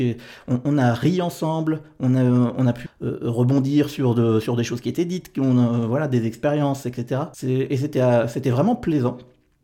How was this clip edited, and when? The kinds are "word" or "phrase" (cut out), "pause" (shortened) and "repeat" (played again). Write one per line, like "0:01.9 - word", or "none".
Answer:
0:02.9 - word
0:07.3 - pause